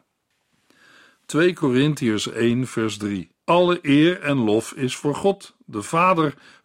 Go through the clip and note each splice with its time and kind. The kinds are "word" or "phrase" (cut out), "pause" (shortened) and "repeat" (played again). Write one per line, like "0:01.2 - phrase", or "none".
0:03.4 - pause